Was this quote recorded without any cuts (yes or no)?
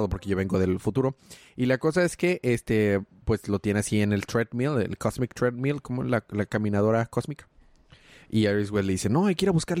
yes